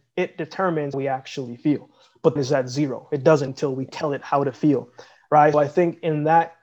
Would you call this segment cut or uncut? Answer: cut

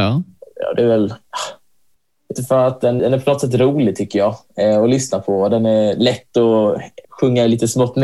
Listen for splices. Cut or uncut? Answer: cut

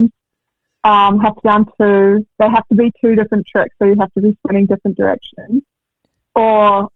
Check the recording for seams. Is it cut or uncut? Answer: cut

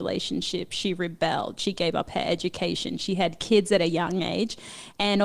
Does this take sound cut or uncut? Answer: uncut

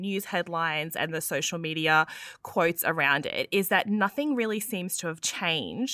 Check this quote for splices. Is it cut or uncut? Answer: uncut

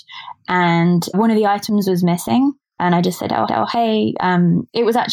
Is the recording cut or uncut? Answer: cut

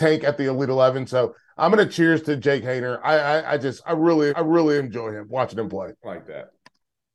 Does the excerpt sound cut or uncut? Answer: cut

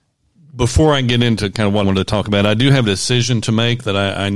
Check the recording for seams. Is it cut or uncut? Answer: cut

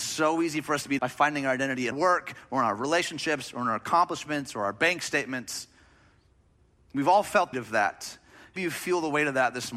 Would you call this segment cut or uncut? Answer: cut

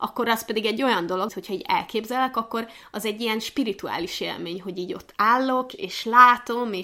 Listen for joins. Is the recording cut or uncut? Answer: cut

